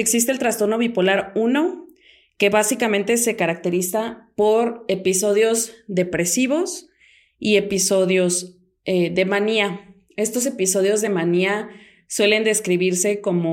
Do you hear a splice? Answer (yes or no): no